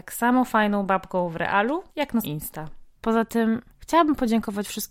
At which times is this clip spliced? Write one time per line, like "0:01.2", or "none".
0:01.9
0:02.2
0:02.9
0:03.7